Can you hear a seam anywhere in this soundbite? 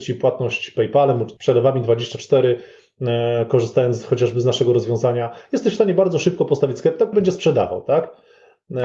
yes; 2 cuts; at 1.4 s, 7.1 s

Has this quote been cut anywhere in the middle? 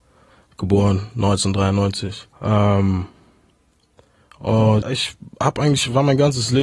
yes; 2 cuts; at 2.3 s, 4.8 s

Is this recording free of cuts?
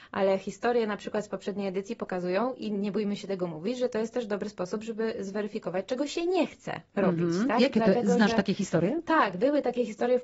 yes; 0 cuts

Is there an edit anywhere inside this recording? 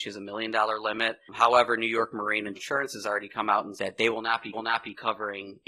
yes; 3 cuts; at 2.5 s, 3.8 s, 4.5 s

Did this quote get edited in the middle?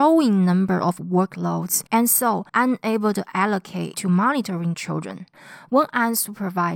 yes; 4 cuts; at 1.9 s, 2.5 s, 3.9 s, 4.7 s

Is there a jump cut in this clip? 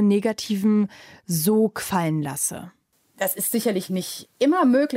no; 0 cuts

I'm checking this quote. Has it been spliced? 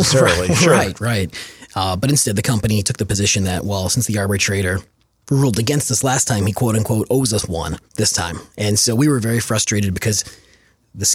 yes; 3 cuts; at 5.0 s, 7.9 s, 8.5 s

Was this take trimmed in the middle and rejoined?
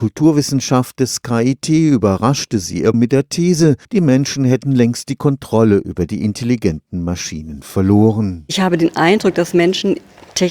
yes; 2 cuts; at 2.9 s, 3.8 s

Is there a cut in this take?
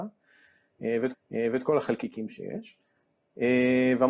yes; 1 cut; at 1.1 s

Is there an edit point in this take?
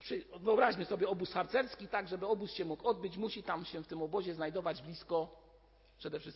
no; 0 cuts

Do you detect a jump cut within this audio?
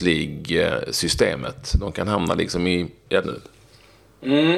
yes; 1 cut; at 3.2 s

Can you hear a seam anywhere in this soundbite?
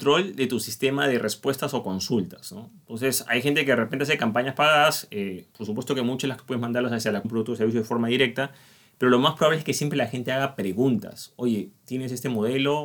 yes; 3 cuts; at 5.5 s, 6.4 s, 7.2 s

